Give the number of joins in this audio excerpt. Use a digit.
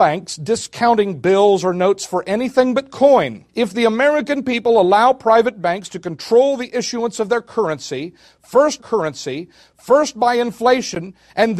2